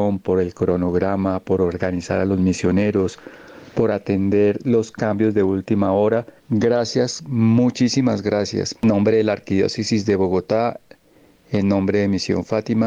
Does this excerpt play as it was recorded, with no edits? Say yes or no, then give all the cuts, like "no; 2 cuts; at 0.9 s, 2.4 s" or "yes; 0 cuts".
no; 2 cuts; at 6.4 s, 8.8 s